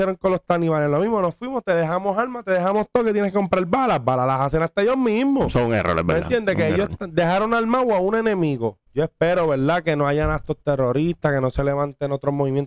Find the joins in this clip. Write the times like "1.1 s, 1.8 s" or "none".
8.9 s